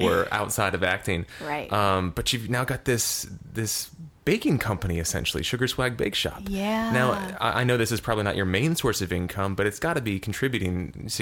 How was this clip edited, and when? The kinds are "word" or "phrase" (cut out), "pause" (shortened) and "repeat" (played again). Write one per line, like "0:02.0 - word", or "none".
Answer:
none